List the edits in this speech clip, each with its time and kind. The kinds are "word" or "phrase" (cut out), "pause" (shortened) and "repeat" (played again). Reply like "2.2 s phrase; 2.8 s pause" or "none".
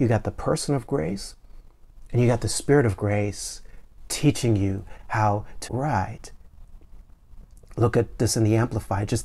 5.7 s word